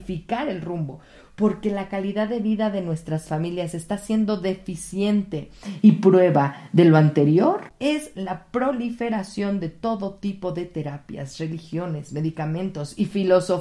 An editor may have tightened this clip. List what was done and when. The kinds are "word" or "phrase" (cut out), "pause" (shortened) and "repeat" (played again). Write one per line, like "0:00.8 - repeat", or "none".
none